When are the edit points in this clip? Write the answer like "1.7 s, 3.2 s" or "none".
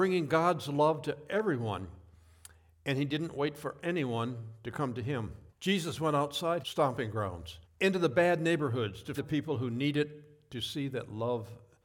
5.5 s, 6.6 s, 7.6 s, 9.2 s